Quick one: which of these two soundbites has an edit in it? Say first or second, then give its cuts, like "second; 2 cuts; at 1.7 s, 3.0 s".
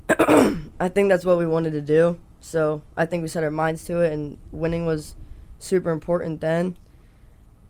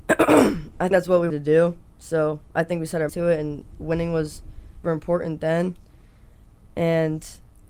second; 4 cuts; at 0.9 s, 1.3 s, 3.1 s, 4.8 s